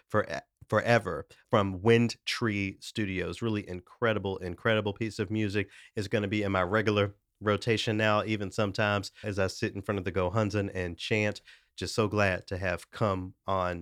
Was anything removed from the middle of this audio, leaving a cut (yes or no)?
yes